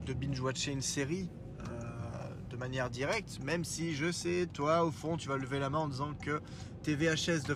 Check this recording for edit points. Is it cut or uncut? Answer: uncut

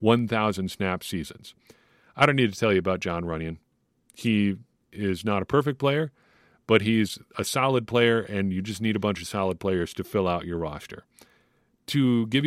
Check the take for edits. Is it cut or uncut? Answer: uncut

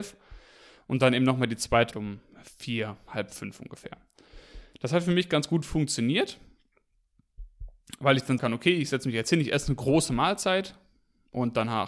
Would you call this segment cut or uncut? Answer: cut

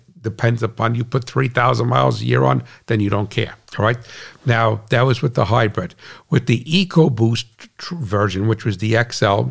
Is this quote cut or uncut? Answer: uncut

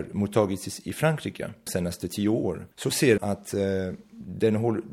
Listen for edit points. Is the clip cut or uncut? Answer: cut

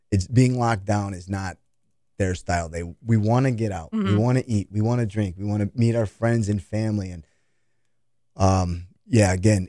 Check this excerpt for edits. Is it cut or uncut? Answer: uncut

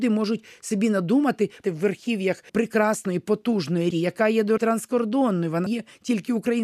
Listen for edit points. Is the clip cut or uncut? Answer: cut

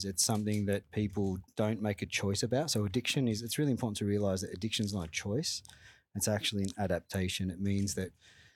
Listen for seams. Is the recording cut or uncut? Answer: uncut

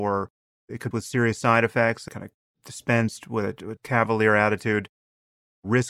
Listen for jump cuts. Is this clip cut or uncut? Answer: cut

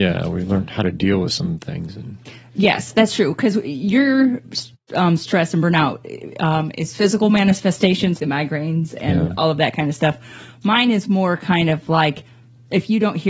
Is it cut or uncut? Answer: cut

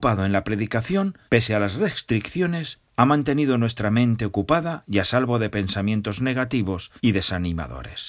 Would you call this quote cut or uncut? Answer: cut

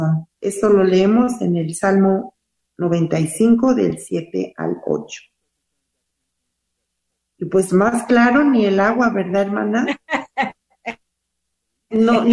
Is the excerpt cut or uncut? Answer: uncut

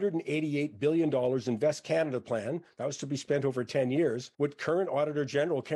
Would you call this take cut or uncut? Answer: cut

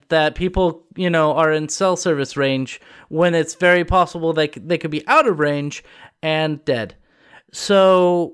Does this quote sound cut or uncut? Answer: uncut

